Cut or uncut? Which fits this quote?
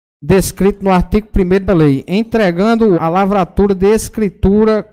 cut